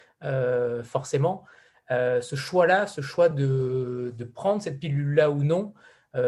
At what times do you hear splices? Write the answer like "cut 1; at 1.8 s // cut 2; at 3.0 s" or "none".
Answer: none